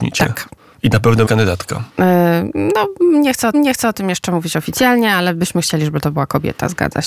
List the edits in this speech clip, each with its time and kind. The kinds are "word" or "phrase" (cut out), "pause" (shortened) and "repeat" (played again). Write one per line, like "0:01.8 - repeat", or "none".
0:01.3 - word
0:01.9 - pause
0:03.5 - repeat